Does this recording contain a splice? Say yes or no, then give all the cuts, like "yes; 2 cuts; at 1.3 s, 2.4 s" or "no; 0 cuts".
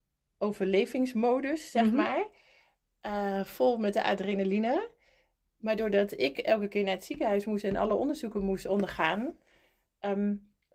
no; 0 cuts